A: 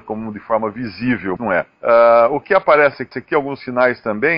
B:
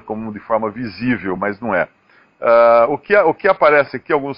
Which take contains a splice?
A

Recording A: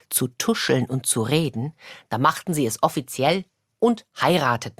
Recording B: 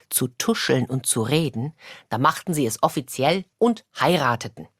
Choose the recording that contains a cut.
B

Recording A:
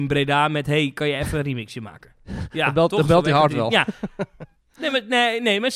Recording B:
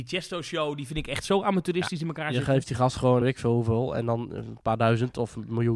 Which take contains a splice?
B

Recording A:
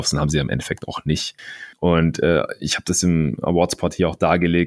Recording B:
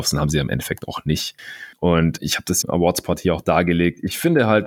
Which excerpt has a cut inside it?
B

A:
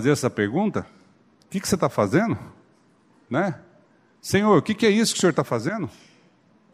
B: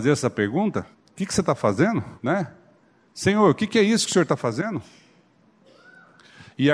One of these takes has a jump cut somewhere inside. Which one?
B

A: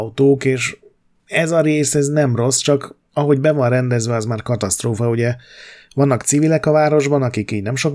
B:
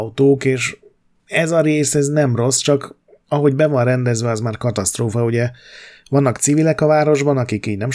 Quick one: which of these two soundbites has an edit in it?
A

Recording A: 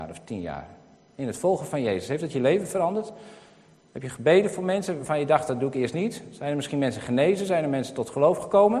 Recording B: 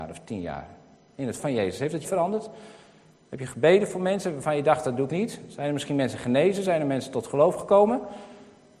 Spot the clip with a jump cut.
B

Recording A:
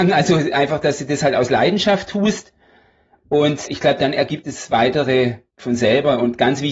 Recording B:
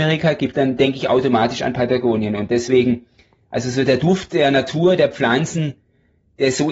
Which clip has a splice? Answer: A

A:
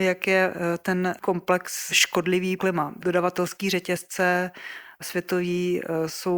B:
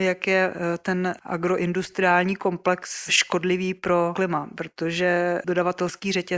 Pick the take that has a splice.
A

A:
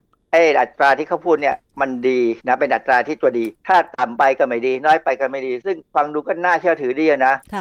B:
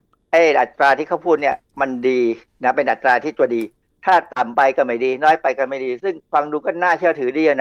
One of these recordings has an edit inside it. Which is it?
A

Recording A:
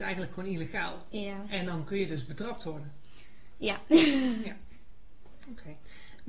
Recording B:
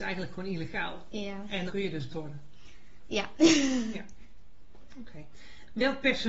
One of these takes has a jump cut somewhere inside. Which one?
B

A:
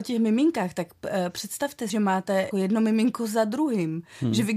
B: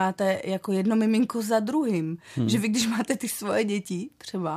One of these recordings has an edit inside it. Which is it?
A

